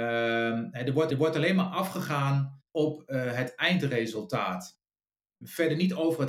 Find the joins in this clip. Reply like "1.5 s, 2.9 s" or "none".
1.1 s, 2.7 s